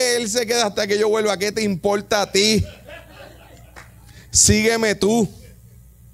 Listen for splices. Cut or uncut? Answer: uncut